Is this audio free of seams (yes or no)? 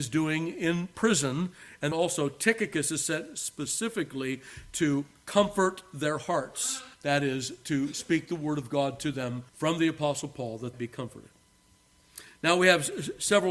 no